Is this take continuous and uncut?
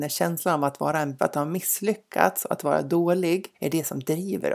no; 2 cuts; at 1.2 s, 3.5 s

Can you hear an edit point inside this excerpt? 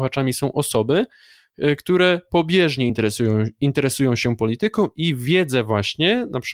no; 0 cuts

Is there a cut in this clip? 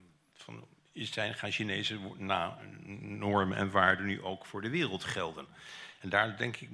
no; 0 cuts

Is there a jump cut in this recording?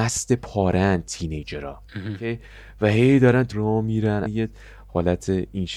yes; 3 cuts; at 1.9 s, 3.5 s, 4.2 s

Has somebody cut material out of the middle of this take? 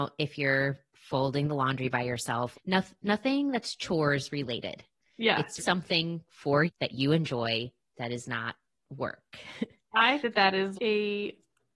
yes; 5 cuts; at 2.5 s, 5.6 s, 6.7 s, 10.2 s, 10.8 s

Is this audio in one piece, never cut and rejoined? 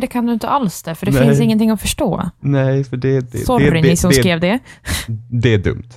yes; 0 cuts

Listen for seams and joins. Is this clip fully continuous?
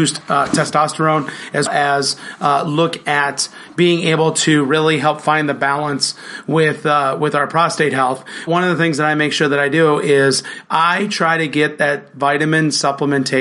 no; 2 cuts; at 1.7 s, 8.5 s

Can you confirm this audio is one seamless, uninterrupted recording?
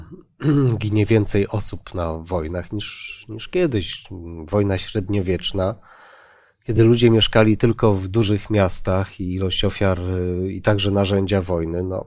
yes; 0 cuts

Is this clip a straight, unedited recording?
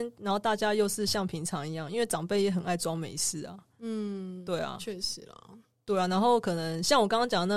yes; 0 cuts

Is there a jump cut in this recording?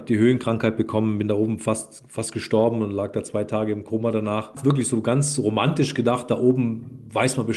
no; 0 cuts

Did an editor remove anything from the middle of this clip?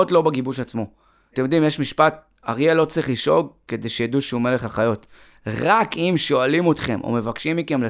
no; 0 cuts

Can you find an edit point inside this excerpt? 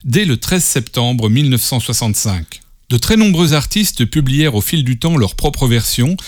no; 0 cuts

